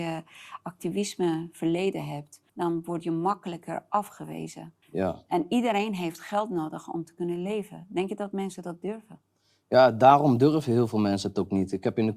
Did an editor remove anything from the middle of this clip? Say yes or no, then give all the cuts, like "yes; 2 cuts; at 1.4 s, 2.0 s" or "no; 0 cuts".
yes; 2 cuts; at 2.5 s, 4.8 s